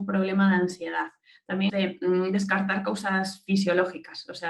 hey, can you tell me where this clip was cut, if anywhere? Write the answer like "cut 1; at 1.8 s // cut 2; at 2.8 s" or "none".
cut 1; at 1.7 s